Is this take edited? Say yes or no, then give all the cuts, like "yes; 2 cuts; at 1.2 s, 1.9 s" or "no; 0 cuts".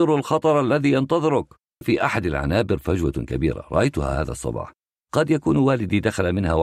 yes; 1 cut; at 1.8 s